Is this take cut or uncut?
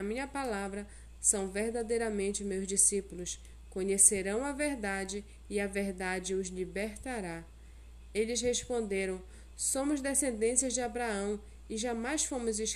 uncut